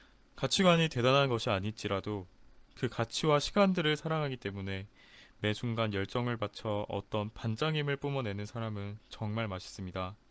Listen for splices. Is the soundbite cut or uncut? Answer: uncut